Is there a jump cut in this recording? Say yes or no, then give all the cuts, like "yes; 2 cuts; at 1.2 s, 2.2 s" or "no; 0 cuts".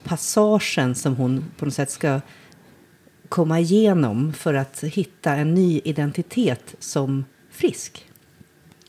no; 0 cuts